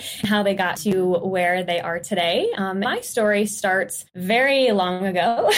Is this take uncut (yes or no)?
no